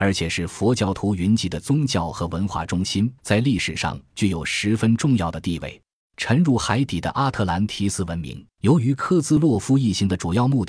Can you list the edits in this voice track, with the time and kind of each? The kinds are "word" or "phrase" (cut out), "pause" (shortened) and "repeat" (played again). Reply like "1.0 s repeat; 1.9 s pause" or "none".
3.2 s pause; 6.0 s pause; 8.5 s pause